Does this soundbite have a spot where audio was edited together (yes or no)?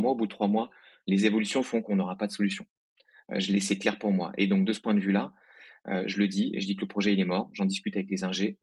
no